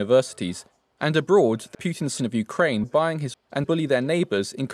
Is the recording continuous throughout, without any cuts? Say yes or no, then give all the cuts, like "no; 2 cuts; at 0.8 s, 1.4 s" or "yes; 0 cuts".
no; 5 cuts; at 1.7 s, 2.2 s, 2.8 s, 3.3 s, 3.6 s